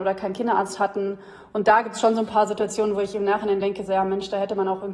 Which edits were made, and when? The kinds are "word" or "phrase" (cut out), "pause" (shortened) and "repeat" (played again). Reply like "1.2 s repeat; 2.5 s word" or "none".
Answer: none